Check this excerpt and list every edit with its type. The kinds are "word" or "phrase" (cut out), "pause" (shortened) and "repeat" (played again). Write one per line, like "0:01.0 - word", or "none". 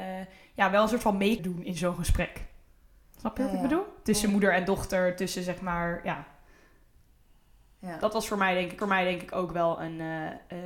0:01.4 - word
0:08.8 - repeat